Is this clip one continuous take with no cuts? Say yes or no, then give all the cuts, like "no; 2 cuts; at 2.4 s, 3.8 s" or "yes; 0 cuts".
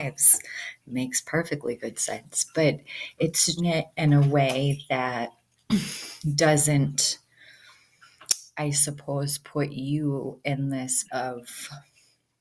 no; 2 cuts; at 3.6 s, 11.0 s